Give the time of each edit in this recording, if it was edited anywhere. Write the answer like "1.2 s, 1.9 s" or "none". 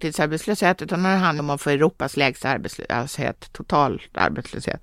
1.4 s